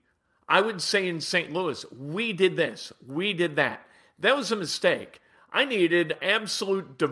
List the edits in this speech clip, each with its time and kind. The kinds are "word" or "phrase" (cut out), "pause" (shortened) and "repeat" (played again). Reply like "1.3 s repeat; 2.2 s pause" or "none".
6.2 s word